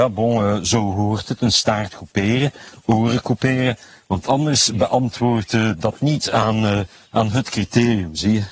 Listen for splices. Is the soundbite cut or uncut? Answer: uncut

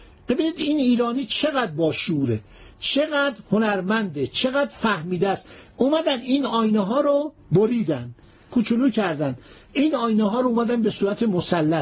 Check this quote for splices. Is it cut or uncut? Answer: uncut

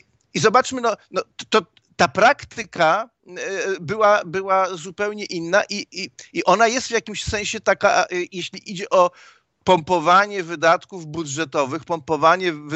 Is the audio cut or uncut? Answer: uncut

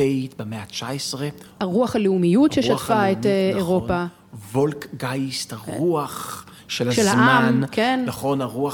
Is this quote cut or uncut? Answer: uncut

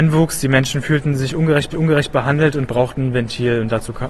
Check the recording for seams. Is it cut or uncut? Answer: cut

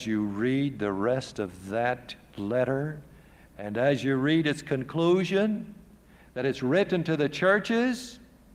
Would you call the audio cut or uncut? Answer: uncut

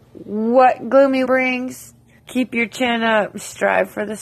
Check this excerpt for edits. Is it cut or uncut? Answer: cut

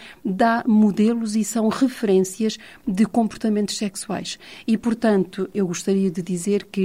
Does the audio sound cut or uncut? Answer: uncut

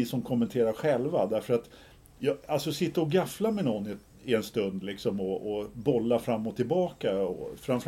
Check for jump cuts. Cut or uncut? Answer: uncut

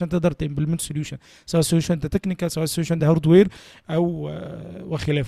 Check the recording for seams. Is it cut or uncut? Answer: uncut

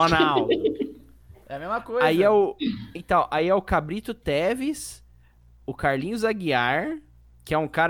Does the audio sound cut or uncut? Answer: uncut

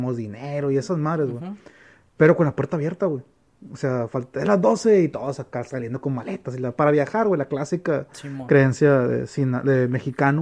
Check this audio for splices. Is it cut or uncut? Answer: uncut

